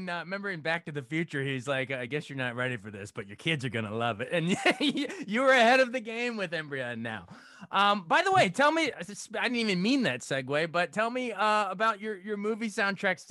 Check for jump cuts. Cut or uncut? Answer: uncut